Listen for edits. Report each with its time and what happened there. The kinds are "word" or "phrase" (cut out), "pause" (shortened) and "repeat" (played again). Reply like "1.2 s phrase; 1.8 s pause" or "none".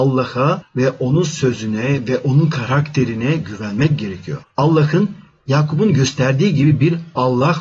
none